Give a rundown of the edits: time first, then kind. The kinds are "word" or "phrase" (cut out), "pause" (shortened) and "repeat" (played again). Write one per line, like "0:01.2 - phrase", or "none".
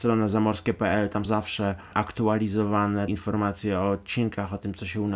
0:01.2 - word
0:03.1 - word

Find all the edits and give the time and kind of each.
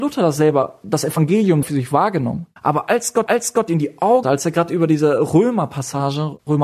0:01.6 - word
0:02.6 - pause
0:03.3 - repeat
0:04.2 - phrase

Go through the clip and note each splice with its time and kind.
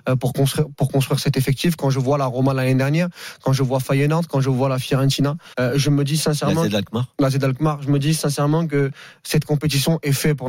0:05.5 - pause

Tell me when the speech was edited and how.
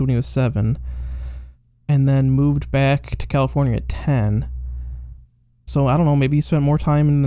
none

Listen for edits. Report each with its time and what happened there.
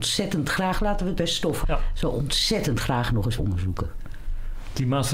0:01.2 - word
0:01.6 - word
0:03.4 - word

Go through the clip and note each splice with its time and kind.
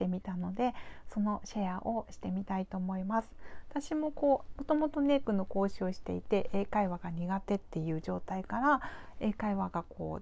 0:05.2 - word

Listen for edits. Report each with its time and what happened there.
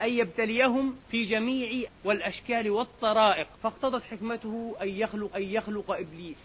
0:01.0 - pause
0:01.9 - word
0:03.5 - pause
0:05.3 - repeat

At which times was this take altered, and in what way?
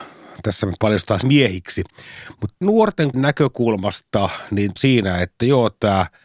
0:01.2 - word
0:02.6 - phrase
0:03.1 - word
0:04.8 - phrase

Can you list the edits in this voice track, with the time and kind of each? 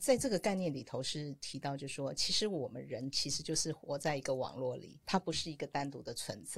none

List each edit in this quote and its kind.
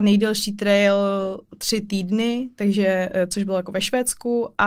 none

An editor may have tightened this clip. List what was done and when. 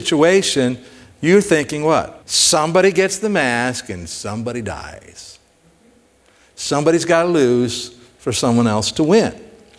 0:02.2 - pause

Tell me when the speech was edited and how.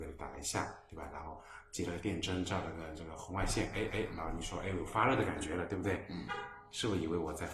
0:03.9 - repeat

